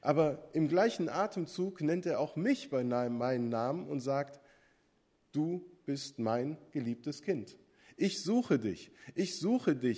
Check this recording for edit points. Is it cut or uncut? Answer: uncut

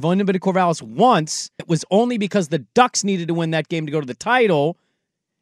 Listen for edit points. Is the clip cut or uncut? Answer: cut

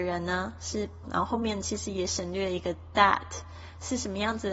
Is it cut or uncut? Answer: cut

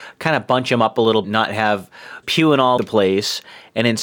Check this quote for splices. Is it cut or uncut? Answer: cut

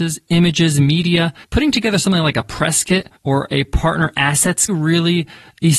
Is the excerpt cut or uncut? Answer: cut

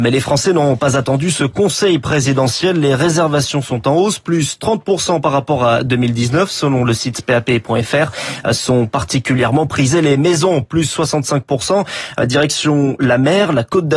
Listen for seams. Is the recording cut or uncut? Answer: uncut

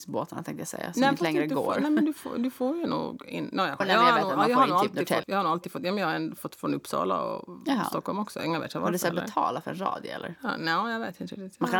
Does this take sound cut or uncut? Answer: cut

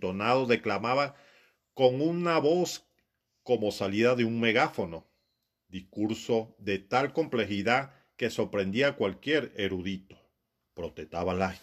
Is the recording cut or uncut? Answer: uncut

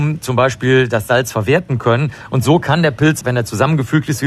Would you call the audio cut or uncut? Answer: cut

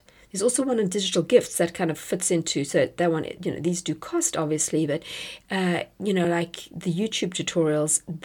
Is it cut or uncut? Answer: uncut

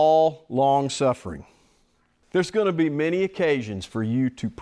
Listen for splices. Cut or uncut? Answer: uncut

